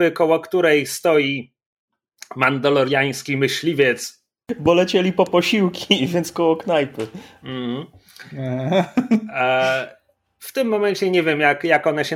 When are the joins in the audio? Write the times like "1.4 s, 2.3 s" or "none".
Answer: none